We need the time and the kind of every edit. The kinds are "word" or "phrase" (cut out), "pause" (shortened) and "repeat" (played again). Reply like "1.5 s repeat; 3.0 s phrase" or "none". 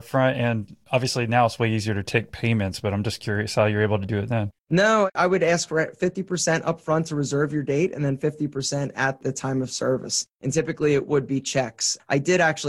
4.6 s pause